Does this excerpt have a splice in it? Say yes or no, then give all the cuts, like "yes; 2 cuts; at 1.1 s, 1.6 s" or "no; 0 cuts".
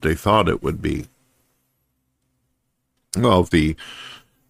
yes; 1 cut; at 3.5 s